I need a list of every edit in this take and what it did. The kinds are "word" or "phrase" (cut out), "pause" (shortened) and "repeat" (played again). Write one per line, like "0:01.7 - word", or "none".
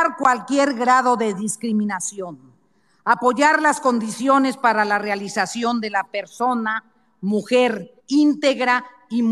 0:08.0 - pause